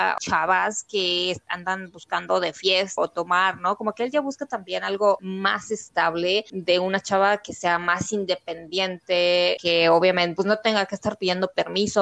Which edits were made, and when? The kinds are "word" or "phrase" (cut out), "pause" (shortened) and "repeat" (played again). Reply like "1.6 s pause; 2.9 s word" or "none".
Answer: 3.0 s word

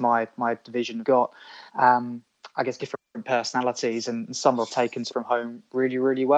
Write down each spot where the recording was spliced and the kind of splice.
1.0 s phrase; 1.7 s pause; 2.8 s word; 4.7 s word; 5.1 s word

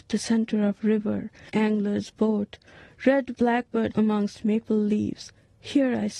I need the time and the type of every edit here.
1.5 s word; 3.4 s word; 3.9 s word

